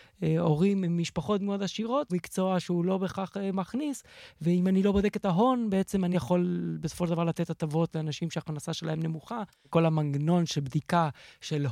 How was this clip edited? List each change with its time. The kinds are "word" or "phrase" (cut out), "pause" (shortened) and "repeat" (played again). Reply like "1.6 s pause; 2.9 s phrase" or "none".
2.1 s word; 6.1 s word